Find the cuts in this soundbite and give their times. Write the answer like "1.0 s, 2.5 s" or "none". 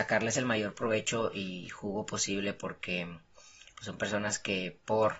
none